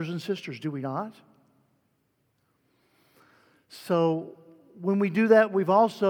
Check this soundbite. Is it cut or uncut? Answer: uncut